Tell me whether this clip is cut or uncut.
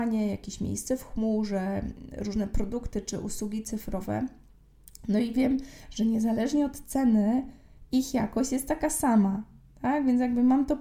uncut